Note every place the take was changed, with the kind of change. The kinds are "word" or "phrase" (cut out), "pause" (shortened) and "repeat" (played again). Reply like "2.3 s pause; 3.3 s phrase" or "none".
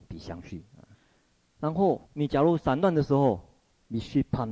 0.9 s pause; 2.1 s pause